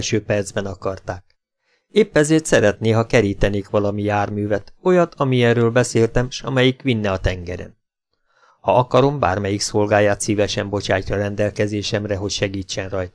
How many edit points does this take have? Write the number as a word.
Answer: zero